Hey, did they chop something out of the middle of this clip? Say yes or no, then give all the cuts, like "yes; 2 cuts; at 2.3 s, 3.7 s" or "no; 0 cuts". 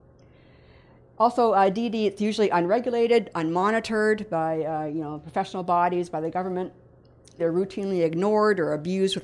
yes; 1 cut; at 7.4 s